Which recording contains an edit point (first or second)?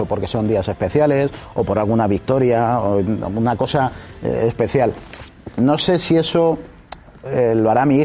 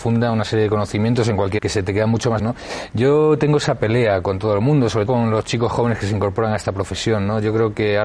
second